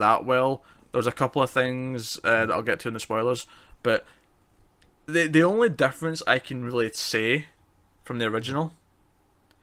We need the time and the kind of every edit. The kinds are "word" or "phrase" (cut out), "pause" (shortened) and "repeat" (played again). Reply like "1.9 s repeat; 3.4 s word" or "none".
5.1 s word